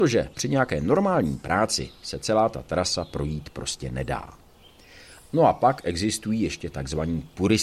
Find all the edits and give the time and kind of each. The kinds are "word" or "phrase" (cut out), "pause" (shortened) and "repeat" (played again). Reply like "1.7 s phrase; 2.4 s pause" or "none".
none